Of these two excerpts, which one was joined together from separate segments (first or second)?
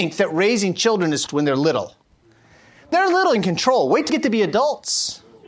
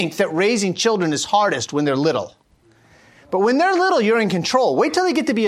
first